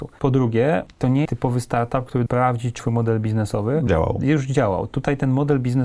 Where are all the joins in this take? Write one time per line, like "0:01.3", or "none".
0:01.3
0:02.3
0:02.8
0:03.9